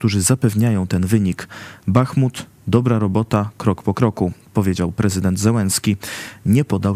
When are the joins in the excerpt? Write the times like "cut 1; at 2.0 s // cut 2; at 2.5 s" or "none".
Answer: none